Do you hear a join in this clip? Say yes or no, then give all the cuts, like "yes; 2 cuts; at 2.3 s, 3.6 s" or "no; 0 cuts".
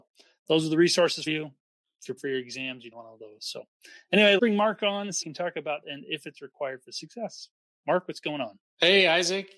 yes; 6 cuts; at 1.3 s, 2.2 s, 2.9 s, 4.4 s, 5.2 s, 5.8 s